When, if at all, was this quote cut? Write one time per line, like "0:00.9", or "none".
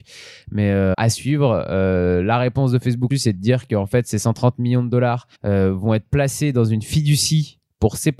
0:00.9
0:03.1
0:05.3